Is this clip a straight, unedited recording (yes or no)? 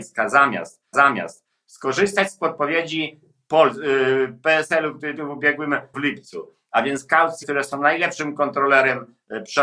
no